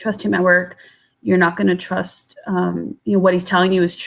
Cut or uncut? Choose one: cut